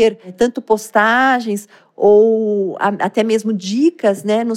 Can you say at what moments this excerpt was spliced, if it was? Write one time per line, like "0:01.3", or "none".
none